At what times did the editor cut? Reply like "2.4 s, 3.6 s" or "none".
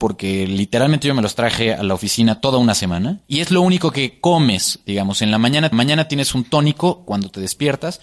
3.2 s, 5.7 s